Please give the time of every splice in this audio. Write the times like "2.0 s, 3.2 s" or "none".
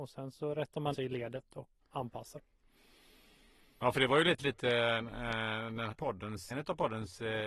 0.9 s, 1.8 s, 4.4 s, 5.9 s, 6.5 s